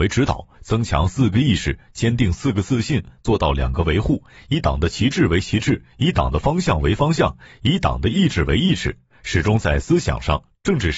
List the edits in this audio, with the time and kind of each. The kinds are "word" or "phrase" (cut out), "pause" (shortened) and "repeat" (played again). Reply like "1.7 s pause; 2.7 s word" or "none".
none